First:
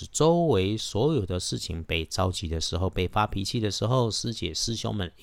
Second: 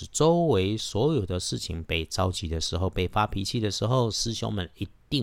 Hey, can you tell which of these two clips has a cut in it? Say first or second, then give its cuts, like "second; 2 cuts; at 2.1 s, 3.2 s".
second; 1 cut; at 4.1 s